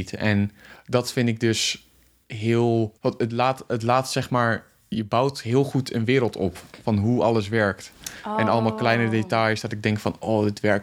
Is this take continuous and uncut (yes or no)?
no